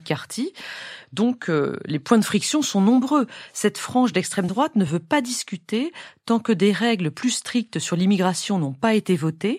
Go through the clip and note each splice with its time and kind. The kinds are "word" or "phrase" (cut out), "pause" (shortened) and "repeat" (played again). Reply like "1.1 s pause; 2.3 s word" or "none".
none